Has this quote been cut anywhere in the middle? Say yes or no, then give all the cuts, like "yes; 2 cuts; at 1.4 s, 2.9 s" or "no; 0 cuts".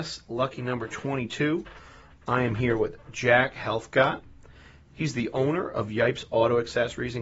no; 0 cuts